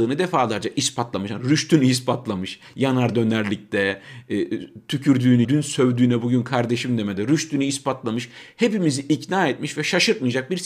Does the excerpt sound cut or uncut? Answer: cut